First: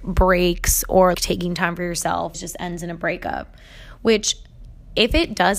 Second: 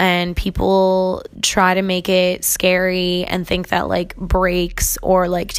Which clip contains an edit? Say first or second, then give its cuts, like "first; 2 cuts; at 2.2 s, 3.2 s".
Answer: first; 2 cuts; at 1.1 s, 2.3 s